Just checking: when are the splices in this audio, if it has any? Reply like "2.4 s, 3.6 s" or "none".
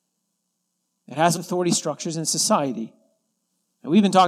1.3 s